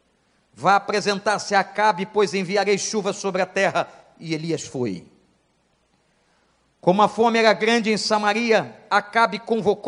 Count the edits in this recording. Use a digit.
0